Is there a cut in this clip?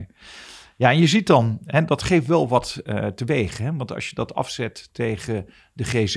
no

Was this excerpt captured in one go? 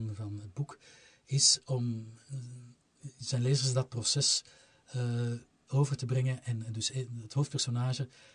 yes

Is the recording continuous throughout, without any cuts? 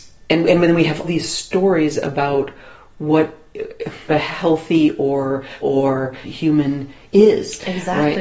no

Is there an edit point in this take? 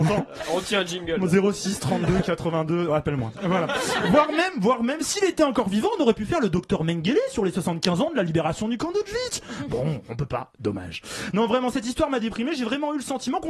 no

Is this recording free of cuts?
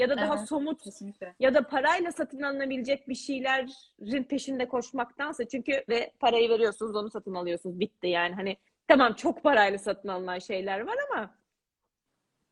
no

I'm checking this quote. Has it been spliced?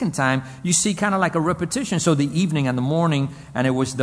no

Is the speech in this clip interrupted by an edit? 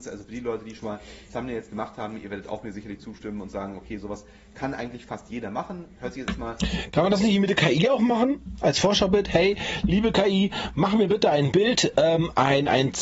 no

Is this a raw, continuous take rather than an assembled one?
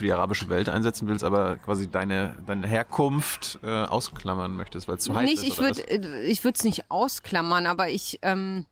yes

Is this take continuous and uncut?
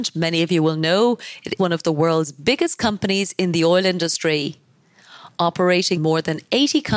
no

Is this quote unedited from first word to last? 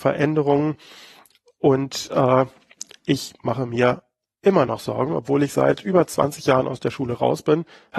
yes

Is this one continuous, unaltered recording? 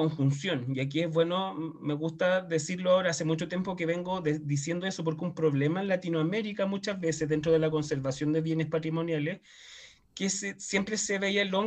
yes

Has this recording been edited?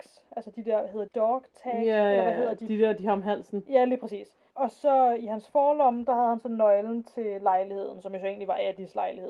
yes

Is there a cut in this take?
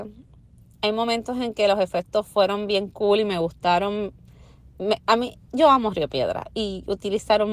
no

